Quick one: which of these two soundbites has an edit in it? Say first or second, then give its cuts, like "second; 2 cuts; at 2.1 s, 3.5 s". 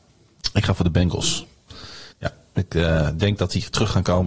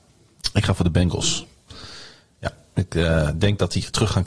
first; 1 cut; at 2.1 s